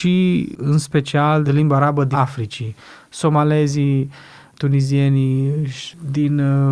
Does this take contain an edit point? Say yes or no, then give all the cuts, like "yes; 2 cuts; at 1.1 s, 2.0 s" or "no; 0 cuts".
yes; 2 cuts; at 1.5 s, 2.1 s